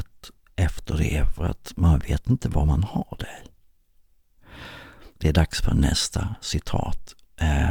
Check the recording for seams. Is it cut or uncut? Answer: cut